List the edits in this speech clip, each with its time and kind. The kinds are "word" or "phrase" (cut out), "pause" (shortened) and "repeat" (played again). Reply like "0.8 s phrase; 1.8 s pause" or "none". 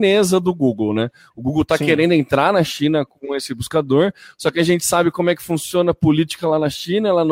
none